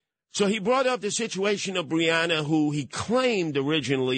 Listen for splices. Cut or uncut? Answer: uncut